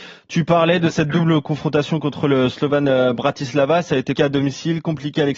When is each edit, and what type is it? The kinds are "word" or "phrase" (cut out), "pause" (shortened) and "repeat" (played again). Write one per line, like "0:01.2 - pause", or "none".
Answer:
0:04.2 - word